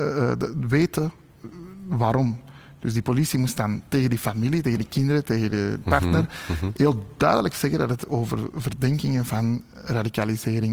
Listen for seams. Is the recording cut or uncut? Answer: uncut